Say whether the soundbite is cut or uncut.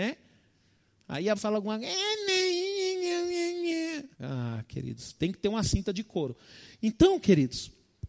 cut